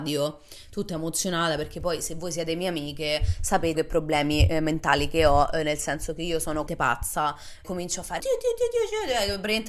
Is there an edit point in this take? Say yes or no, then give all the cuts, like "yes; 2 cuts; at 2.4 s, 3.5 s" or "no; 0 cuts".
yes; 4 cuts; at 3.7 s, 6.7 s, 7.6 s, 8.2 s